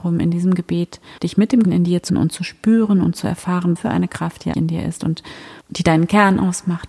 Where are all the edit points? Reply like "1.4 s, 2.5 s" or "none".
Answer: 1.2 s, 1.6 s, 2.1 s, 3.8 s, 4.5 s, 5.6 s